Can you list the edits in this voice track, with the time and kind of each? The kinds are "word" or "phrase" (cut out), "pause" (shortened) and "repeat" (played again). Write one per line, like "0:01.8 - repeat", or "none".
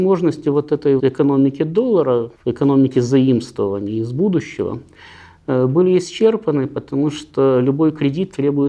0:01.0 - word
0:02.3 - pause